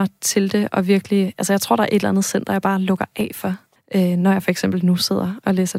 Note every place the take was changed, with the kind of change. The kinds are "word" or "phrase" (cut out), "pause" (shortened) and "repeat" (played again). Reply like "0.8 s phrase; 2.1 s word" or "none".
3.8 s word